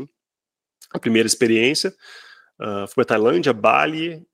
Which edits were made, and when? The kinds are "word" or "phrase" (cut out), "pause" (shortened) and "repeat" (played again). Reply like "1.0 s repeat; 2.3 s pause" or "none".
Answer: none